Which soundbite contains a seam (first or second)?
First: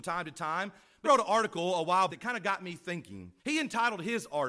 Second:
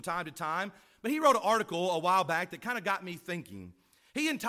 first